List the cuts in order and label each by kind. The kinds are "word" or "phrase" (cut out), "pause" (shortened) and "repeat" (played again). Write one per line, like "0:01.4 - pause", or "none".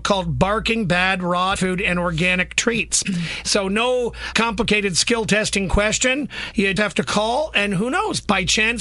0:01.6 - word
0:04.3 - word
0:06.8 - word